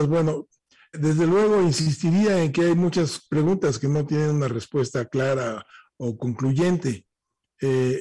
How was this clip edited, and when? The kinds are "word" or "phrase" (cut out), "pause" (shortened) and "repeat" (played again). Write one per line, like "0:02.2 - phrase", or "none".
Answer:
0:00.9 - word